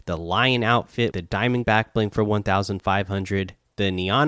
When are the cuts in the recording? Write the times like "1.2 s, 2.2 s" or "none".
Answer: 1.1 s, 1.6 s